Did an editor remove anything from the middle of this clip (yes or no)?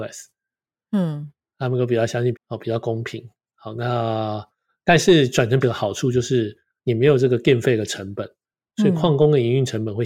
yes